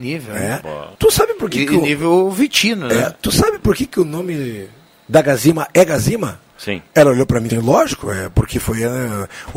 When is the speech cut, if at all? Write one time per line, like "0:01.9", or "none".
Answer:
0:00.9
0:04.9
0:07.5